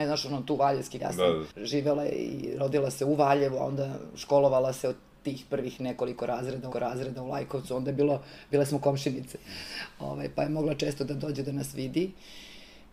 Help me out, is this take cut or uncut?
cut